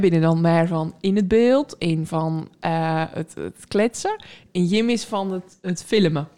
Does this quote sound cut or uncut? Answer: uncut